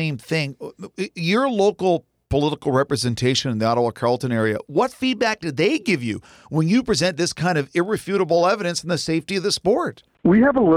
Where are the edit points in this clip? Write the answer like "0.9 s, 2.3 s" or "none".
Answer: none